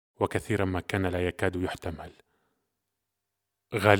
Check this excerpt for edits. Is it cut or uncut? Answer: uncut